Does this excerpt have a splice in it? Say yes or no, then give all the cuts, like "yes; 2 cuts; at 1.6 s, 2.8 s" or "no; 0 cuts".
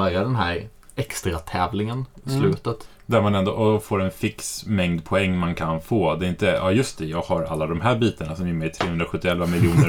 no; 0 cuts